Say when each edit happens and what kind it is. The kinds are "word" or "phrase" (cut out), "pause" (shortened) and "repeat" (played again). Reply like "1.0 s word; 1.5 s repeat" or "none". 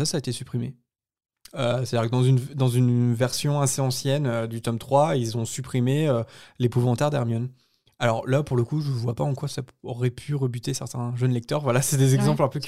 none

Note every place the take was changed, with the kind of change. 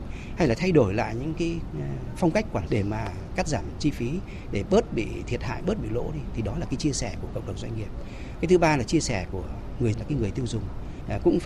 2.7 s word; 9.9 s word

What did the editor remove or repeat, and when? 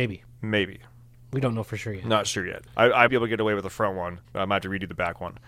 2.7 s pause; 3.1 s word; 4.2 s pause

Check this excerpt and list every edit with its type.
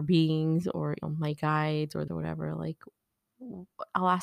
1.0 s word; 2.1 s word

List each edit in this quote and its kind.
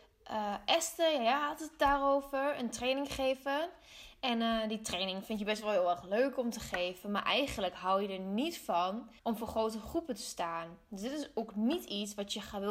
9.2 s pause

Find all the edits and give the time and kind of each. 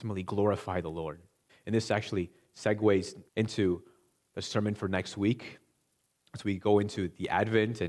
1.5 s pause; 3.3 s pause

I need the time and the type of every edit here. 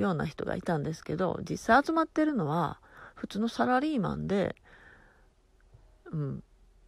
none

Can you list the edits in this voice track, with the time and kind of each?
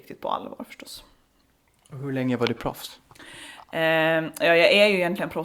none

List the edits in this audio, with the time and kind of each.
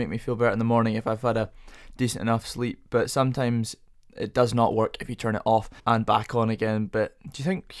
5.8 s pause

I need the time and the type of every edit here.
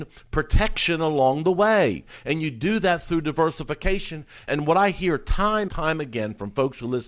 5.7 s word

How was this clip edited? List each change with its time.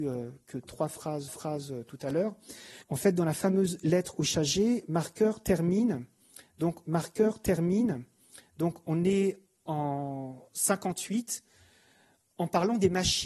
1.3 s repeat; 2.8 s pause; 6.9 s repeat

